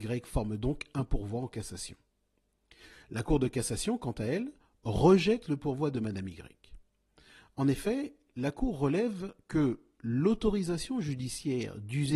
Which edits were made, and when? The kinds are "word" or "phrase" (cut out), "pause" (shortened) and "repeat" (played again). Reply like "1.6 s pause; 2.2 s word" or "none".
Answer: none